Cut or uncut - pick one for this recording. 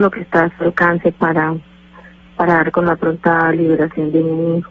uncut